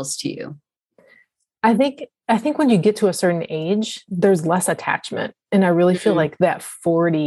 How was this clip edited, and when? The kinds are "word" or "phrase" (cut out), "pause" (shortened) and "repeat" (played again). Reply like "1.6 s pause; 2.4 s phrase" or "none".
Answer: 4.1 s word